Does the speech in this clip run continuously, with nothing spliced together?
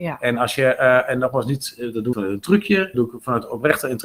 no; 2 cuts; at 2.1 s, 2.9 s

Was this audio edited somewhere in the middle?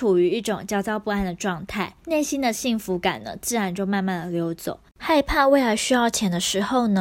yes; 2 cuts; at 2.0 s, 4.9 s

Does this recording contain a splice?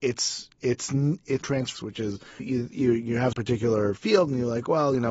yes; 4 cuts; at 1.4 s, 1.7 s, 2.4 s, 3.3 s

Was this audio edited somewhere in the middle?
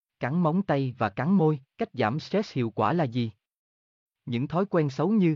yes; 1 cut; at 1.7 s

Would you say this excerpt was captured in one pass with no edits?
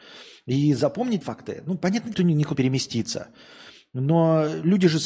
no; 3 cuts; at 1.2 s, 2.1 s, 2.5 s

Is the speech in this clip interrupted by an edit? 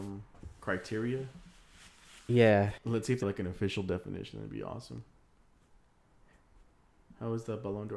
yes; 2 cuts; at 2.8 s, 3.2 s

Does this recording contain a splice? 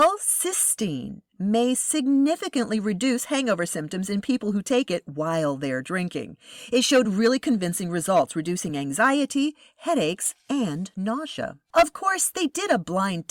no; 0 cuts

